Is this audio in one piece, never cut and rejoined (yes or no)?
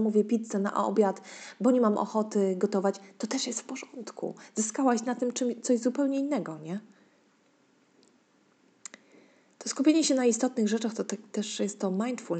yes